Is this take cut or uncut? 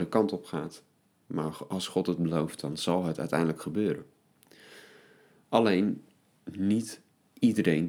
uncut